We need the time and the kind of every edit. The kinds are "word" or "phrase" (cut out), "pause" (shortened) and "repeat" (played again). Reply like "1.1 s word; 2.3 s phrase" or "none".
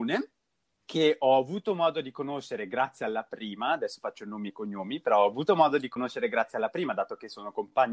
none